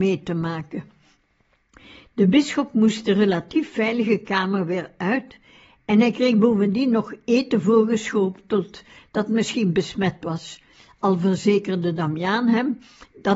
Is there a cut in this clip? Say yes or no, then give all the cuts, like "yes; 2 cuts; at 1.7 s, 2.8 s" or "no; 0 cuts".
no; 0 cuts